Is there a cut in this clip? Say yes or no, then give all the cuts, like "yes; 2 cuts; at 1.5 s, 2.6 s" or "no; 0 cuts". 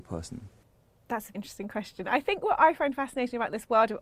yes; 1 cut; at 1.3 s